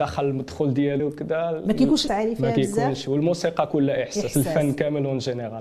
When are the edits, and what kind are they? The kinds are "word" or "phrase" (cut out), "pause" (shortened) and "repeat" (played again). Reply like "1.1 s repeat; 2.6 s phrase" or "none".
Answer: 1.0 s word; 2.1 s word